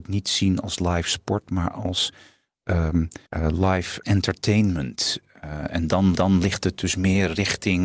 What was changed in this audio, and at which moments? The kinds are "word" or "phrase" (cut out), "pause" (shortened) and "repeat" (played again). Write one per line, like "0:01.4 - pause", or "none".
0:03.3 - pause
0:04.0 - word
0:06.1 - repeat